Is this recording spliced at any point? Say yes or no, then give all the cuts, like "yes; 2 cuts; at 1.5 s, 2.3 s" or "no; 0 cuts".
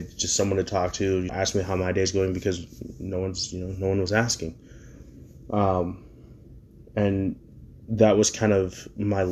yes; 1 cut; at 1.3 s